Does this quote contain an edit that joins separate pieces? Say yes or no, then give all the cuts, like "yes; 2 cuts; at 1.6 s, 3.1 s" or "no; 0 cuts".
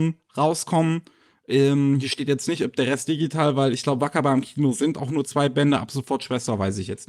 no; 0 cuts